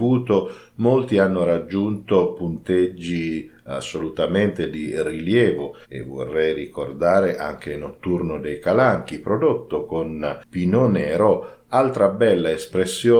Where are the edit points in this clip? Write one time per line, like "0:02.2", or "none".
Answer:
0:05.8